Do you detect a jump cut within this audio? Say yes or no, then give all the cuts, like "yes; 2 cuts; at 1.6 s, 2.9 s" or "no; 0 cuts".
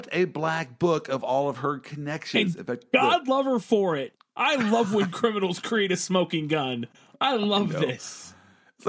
no; 0 cuts